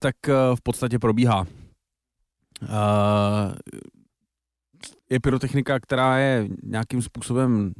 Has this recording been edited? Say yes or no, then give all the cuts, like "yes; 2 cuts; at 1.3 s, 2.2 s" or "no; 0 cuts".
yes; 1 cut; at 5.0 s